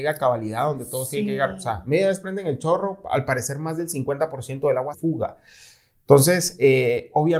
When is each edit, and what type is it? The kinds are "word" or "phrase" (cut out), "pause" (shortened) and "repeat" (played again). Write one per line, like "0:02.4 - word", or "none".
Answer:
0:04.9 - word